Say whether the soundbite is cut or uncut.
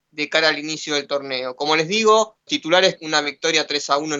cut